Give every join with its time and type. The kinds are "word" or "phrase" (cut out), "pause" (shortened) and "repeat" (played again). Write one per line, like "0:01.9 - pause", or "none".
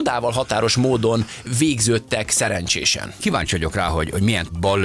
none